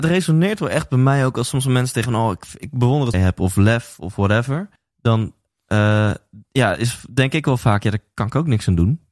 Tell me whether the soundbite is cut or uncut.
cut